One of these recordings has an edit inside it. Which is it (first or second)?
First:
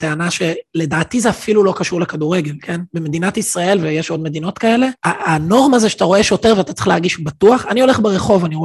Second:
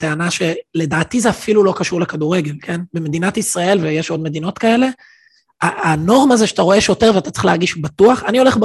first